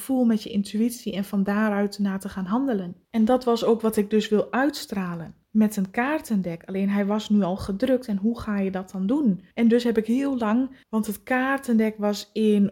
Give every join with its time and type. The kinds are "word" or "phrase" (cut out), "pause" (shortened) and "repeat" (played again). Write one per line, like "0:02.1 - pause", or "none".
0:03.0 - pause
0:05.4 - pause
0:09.5 - pause
0:10.8 - pause